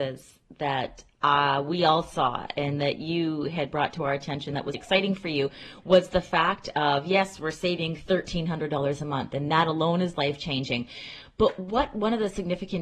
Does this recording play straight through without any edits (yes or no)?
no